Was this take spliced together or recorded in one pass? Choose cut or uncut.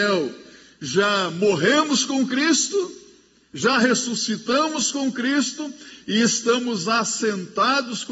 uncut